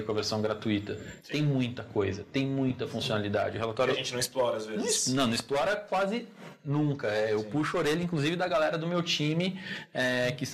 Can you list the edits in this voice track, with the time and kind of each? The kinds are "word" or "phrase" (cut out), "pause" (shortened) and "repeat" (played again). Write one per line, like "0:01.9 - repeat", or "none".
none